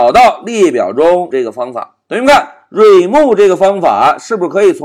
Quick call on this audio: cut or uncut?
cut